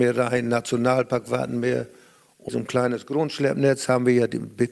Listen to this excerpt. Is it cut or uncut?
cut